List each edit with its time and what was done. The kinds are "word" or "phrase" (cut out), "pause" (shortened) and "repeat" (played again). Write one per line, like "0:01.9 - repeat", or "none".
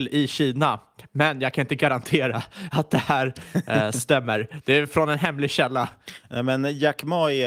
none

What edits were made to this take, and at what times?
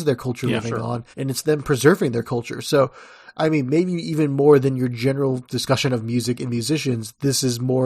0:01.1 - pause

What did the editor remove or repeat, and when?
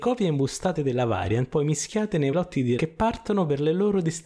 0:01.5 - word
0:02.3 - word
0:02.8 - word

